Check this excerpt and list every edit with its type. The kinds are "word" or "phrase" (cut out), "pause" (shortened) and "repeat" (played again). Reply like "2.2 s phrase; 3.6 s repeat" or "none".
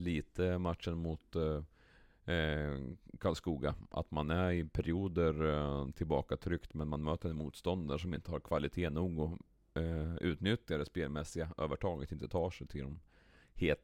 none